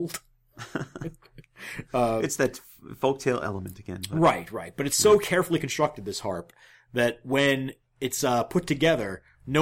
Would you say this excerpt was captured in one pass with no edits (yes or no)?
yes